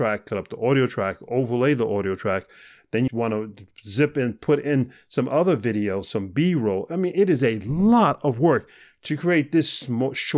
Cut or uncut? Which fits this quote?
cut